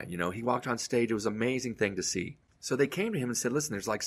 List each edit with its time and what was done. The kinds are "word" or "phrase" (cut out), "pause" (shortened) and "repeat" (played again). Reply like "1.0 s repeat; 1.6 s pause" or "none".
none